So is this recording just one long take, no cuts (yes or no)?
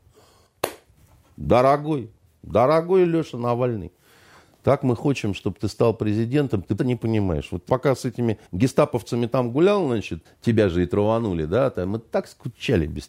no